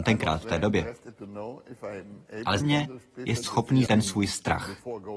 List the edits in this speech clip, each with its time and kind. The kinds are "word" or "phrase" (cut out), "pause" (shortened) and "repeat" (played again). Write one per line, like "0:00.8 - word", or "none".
0:02.6 - word
0:03.4 - word
0:03.9 - word